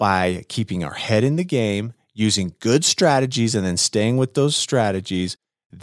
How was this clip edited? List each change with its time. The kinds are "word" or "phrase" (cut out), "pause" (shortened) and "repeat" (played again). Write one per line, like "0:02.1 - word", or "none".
none